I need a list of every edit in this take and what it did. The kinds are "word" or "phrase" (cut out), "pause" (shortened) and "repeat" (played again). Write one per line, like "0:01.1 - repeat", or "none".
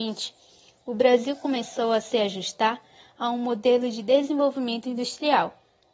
none